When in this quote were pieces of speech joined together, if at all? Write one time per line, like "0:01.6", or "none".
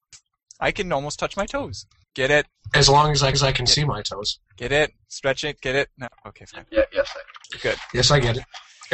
0:01.9
0:03.3
0:07.4